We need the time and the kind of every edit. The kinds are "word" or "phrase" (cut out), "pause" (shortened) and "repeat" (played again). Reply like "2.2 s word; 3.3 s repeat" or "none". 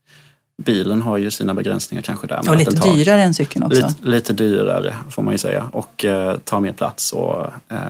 none